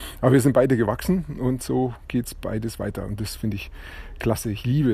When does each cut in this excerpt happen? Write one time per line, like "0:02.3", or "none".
none